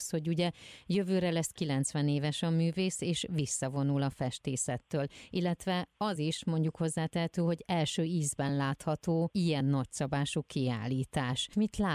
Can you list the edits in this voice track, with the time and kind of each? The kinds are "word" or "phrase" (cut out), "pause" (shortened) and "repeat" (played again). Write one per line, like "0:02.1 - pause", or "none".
none